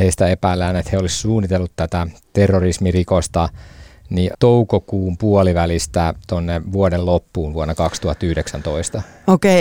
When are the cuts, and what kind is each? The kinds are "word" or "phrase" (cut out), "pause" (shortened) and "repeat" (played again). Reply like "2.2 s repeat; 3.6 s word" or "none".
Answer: 4.3 s word